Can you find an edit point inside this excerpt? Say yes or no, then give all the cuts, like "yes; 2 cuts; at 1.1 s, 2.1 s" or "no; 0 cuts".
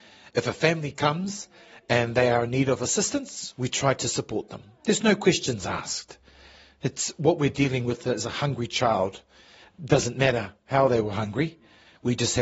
no; 0 cuts